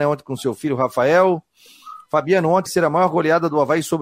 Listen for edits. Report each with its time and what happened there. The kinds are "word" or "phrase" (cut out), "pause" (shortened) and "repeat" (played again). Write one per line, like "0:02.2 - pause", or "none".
0:02.7 - word